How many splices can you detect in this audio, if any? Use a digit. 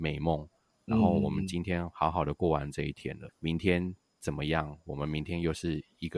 1